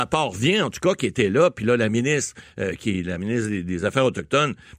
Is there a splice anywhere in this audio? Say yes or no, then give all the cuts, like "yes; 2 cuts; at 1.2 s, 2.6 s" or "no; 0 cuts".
no; 0 cuts